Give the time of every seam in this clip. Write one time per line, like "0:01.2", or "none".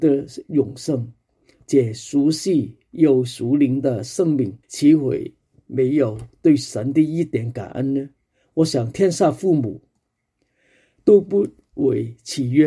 0:04.6